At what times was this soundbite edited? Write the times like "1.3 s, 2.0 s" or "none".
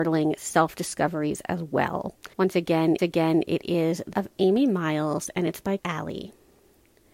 2.3 s, 3.0 s, 4.1 s, 5.8 s

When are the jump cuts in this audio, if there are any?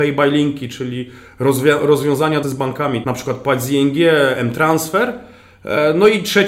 2.4 s, 3.0 s

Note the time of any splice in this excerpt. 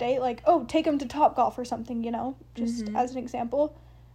none

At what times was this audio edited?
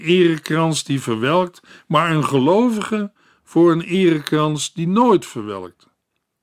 none

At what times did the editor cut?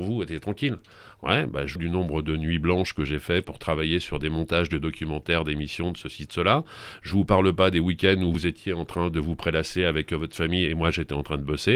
1.8 s, 8.3 s

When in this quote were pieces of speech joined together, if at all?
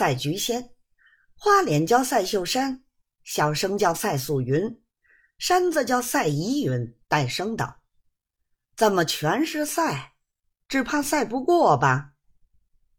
7.0 s

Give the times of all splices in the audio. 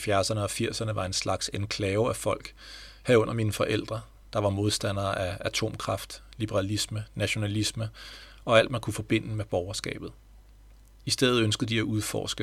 none

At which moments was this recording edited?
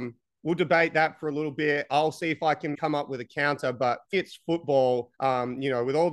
2.7 s, 4.1 s, 5.1 s

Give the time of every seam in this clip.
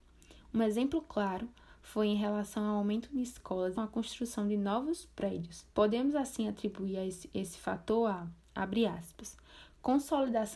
3.7 s, 5.7 s

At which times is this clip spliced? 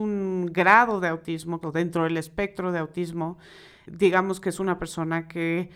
1.6 s, 3.9 s

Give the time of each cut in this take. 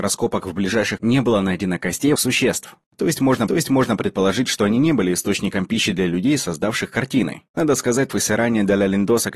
1.0 s, 2.2 s, 3.5 s, 7.5 s, 8.1 s

